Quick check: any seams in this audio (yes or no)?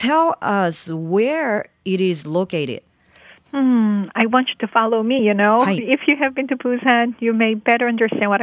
no